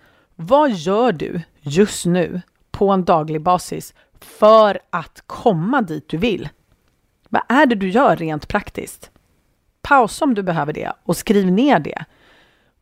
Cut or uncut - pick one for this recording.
uncut